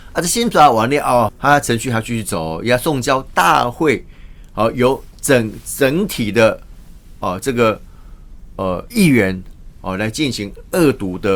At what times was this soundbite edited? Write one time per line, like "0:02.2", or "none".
0:01.3